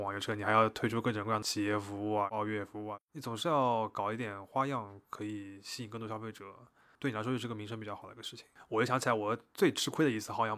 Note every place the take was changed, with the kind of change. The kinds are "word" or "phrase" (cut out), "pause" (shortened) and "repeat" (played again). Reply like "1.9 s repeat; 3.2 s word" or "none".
none